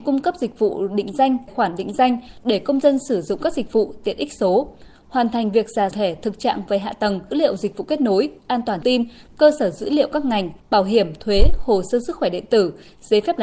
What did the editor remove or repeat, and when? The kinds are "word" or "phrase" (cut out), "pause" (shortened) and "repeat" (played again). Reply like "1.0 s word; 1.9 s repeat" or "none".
1.5 s word; 5.9 s phrase; 7.3 s word; 8.8 s word; 10.6 s pause